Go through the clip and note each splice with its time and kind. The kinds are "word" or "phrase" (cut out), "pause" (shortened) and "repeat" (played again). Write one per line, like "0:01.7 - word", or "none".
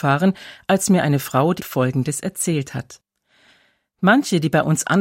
0:01.6 - phrase